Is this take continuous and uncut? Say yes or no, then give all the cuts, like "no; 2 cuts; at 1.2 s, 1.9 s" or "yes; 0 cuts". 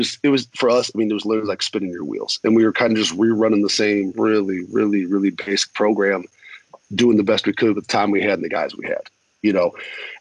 yes; 0 cuts